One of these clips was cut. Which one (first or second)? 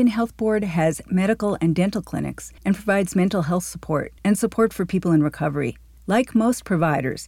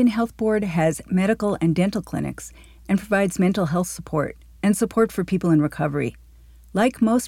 first